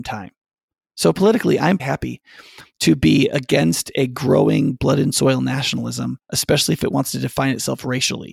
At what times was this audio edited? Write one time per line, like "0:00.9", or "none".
0:01.8